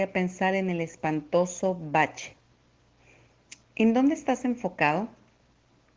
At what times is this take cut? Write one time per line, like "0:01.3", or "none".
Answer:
0:03.6